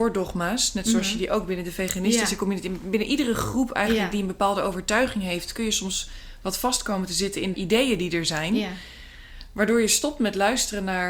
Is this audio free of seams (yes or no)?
no